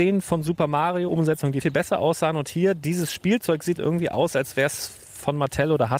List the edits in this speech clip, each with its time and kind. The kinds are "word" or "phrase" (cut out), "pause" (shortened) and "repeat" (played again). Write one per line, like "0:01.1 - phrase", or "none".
0:01.1 - word
0:01.6 - word
0:03.8 - word

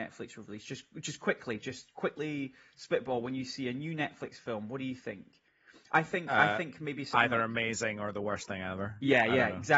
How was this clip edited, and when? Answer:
none

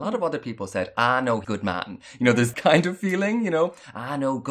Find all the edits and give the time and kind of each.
0:01.4 - word
0:02.5 - word

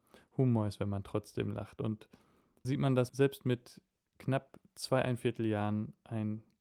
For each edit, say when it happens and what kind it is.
0:02.6 - word
0:03.1 - word

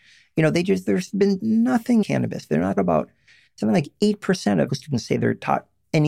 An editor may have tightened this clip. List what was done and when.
0:01.4 - word
0:02.0 - word
0:02.8 - word
0:03.6 - word
0:04.7 - word

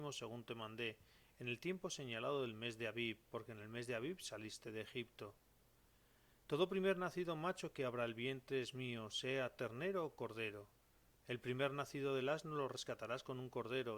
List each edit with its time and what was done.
none

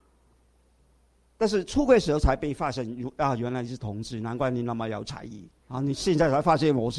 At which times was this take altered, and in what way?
0:05.6 - pause

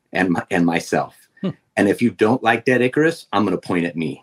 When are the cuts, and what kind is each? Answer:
none

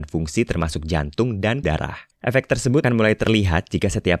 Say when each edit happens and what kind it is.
0:01.6 - word
0:02.1 - pause
0:02.8 - word

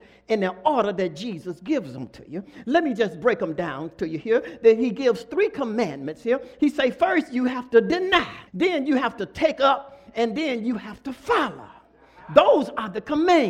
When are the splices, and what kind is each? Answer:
0:08.5 - pause

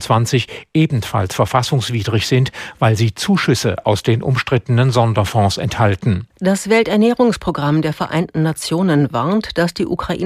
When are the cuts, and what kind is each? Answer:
0:06.3 - pause

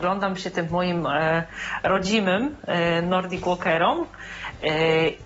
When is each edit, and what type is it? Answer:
none

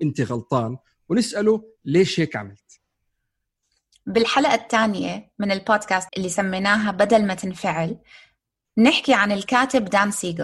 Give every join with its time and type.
0:06.1 - phrase

